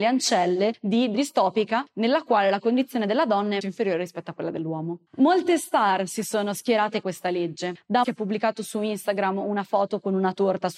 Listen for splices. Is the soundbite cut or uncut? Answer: cut